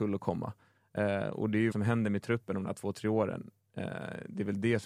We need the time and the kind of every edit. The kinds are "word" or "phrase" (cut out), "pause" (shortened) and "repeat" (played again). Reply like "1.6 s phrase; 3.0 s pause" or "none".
1.7 s phrase